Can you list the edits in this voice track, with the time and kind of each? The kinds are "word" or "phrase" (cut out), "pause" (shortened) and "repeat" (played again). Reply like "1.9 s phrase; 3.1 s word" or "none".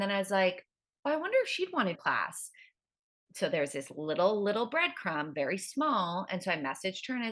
1.9 s phrase